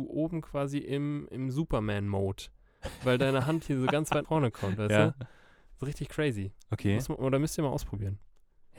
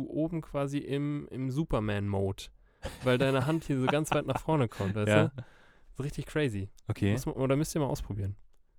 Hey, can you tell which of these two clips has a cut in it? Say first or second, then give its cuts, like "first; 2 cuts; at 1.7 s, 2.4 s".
first; 1 cut; at 4.2 s